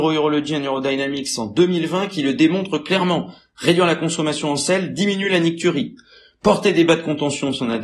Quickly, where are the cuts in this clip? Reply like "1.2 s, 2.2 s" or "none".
none